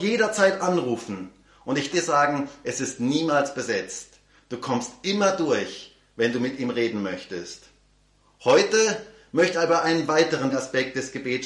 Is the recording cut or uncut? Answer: cut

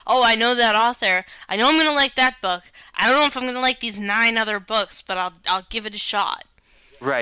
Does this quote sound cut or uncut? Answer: uncut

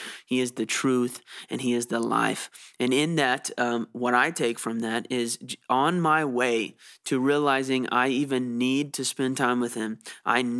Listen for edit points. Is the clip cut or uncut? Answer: uncut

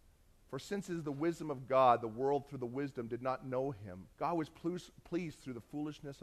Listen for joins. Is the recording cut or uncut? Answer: cut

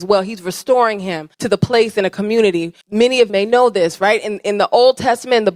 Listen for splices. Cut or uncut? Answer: cut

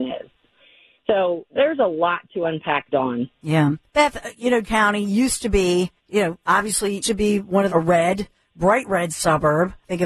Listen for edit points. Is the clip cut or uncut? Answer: cut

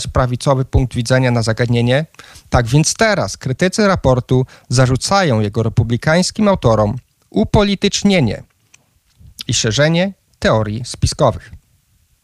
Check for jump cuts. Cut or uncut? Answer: uncut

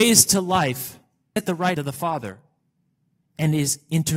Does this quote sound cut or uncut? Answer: cut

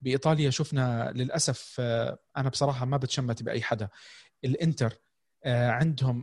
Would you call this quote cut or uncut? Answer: uncut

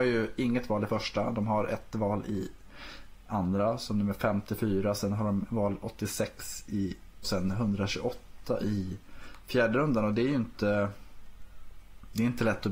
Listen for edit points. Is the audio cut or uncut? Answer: cut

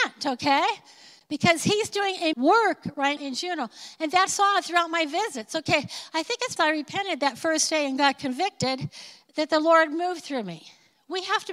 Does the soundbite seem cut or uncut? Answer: cut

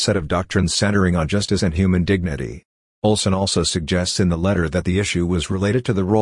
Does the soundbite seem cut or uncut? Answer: uncut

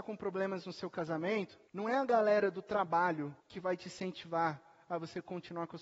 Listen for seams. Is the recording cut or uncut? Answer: cut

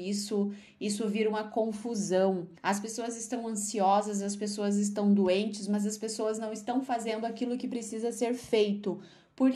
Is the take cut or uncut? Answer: cut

